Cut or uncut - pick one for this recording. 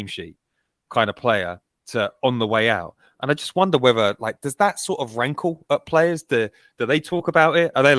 uncut